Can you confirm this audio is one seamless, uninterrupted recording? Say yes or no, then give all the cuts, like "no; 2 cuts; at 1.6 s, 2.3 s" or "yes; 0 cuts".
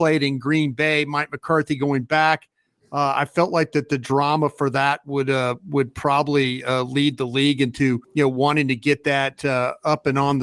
no; 1 cut; at 8.0 s